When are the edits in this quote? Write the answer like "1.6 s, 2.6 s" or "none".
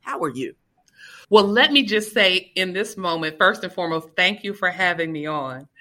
1.2 s